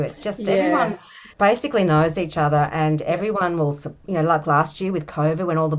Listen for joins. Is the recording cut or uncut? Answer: cut